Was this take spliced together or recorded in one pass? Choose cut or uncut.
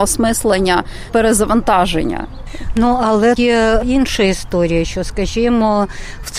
cut